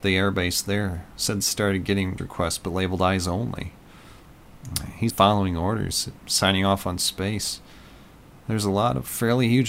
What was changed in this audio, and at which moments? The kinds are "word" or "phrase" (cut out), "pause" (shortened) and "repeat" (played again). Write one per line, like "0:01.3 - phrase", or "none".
0:01.4 - word
0:02.2 - word
0:05.1 - word